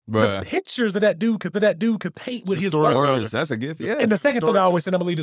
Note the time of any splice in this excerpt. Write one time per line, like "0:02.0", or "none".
0:01.5